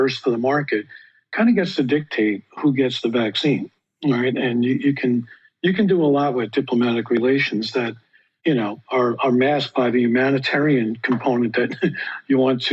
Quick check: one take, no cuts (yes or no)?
yes